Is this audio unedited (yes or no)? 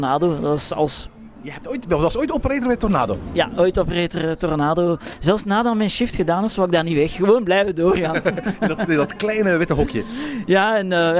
yes